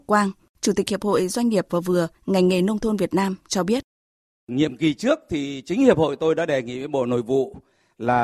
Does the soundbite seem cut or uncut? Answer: cut